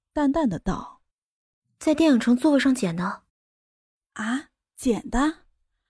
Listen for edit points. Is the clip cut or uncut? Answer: cut